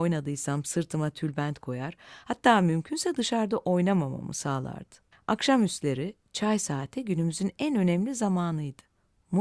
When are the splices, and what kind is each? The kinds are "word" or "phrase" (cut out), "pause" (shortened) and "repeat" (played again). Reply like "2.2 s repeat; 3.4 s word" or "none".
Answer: 5.1 s pause